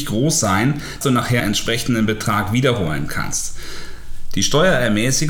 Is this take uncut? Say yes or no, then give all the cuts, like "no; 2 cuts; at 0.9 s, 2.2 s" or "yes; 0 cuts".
no; 2 cuts; at 1.0 s, 1.4 s